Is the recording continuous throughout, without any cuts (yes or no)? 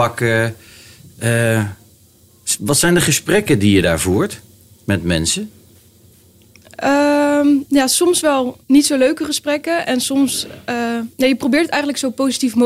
no